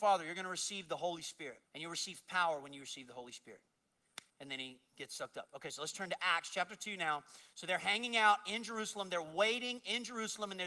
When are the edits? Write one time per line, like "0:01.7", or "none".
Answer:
0:01.7
0:04.3